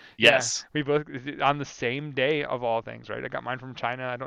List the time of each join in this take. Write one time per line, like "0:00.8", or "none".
none